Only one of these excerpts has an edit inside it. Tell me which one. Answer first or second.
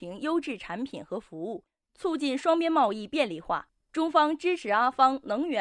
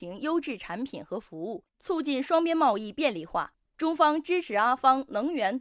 second